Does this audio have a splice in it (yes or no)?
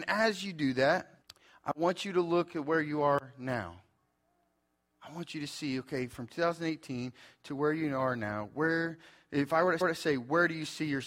yes